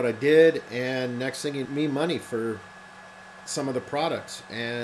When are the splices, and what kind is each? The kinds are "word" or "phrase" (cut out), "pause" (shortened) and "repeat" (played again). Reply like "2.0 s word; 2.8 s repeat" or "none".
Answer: 1.6 s phrase